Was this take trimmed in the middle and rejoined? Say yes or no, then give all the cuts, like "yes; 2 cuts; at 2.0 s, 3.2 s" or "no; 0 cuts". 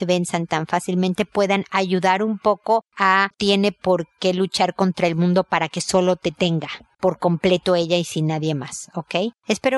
yes; 1 cut; at 3.3 s